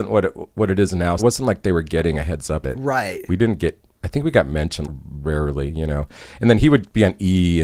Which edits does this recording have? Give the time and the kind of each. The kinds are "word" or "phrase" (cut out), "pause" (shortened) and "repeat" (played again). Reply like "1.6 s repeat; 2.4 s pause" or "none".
1.2 s word; 2.6 s word; 4.8 s word